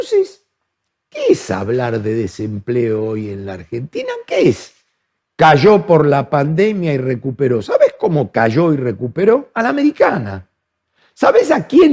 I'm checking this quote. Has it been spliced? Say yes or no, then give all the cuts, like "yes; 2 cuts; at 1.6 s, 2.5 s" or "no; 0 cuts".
no; 0 cuts